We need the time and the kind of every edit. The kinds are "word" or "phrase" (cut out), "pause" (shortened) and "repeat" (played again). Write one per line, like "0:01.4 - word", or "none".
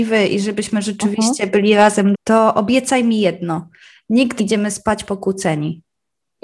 0:02.1 - word
0:04.4 - word